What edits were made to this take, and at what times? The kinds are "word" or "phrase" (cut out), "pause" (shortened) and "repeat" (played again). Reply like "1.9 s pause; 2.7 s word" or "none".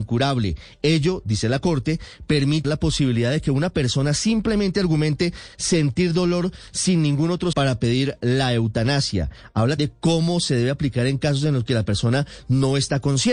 2.6 s word; 7.5 s word; 9.8 s word